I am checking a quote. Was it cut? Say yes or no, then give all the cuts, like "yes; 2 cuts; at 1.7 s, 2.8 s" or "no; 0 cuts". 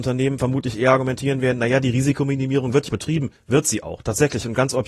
yes; 1 cut; at 2.9 s